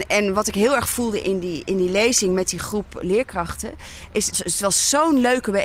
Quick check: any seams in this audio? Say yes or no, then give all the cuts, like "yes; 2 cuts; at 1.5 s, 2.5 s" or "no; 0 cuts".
yes; 2 cuts; at 1.2 s, 4.3 s